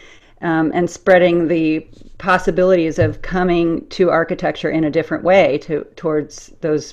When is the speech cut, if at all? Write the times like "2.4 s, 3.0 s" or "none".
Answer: none